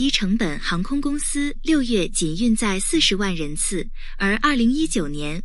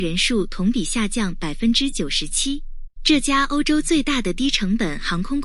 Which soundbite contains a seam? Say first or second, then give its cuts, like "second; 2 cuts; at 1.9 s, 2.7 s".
second; 1 cut; at 2.9 s